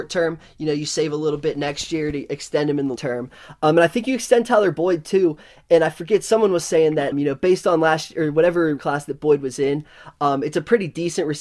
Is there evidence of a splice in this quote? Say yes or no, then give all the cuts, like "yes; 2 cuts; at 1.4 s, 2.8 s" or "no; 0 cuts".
yes; 3 cuts; at 3.0 s, 7.1 s, 8.8 s